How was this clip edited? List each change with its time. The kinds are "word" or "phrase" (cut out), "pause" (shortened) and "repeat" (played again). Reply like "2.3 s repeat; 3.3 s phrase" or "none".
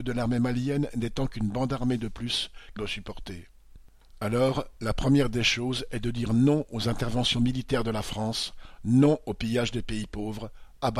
2.8 s phrase